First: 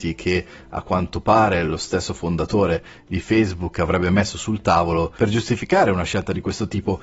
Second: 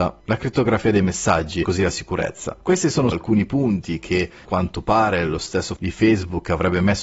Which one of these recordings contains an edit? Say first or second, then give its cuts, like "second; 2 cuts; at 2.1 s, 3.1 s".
second; 4 cuts; at 1.6 s, 3.1 s, 4.4 s, 5.8 s